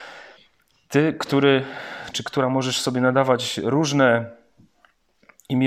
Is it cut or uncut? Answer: uncut